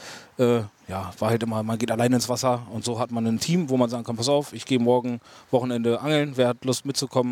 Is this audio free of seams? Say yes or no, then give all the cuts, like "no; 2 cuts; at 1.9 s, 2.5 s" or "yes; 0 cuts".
yes; 0 cuts